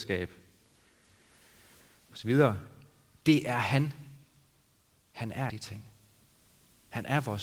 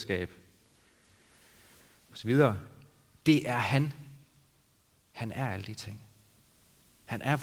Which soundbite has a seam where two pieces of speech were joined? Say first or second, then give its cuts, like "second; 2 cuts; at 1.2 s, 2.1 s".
first; 1 cut; at 5.5 s